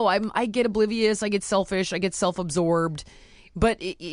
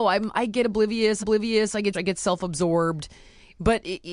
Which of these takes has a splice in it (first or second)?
second